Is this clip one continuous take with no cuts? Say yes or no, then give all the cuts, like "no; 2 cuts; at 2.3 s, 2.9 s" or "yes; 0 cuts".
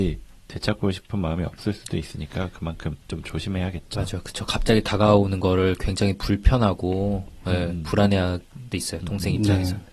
no; 1 cut; at 8.7 s